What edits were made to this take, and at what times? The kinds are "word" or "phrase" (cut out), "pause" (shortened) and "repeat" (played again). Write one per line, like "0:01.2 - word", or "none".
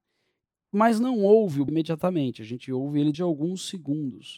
0:01.7 - phrase
0:03.1 - word